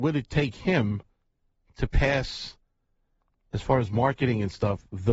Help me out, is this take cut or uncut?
uncut